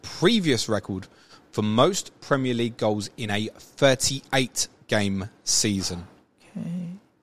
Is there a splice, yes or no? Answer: no